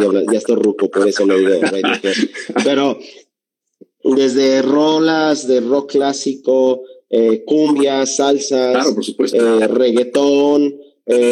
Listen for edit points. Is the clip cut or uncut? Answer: uncut